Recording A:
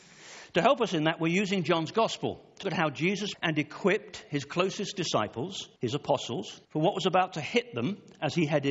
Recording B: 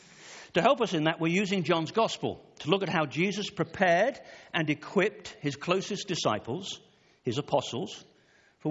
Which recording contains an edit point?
A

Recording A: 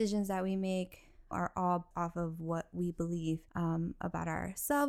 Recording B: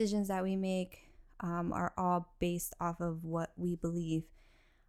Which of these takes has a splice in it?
A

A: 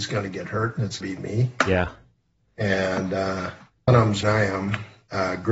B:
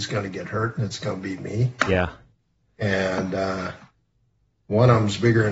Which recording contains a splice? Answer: A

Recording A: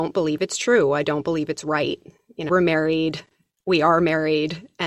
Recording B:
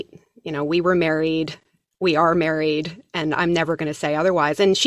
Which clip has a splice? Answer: A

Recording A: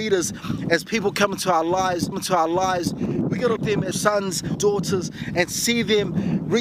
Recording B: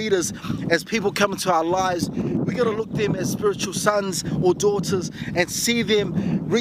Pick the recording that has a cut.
A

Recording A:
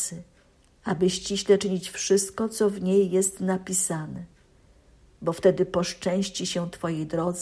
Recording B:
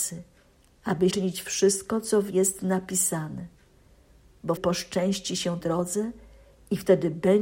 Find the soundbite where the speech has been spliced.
B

